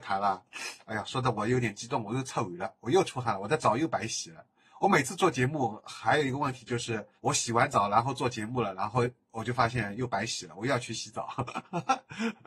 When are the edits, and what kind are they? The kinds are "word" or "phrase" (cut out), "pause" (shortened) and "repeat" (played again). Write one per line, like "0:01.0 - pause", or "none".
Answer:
0:07.2 - pause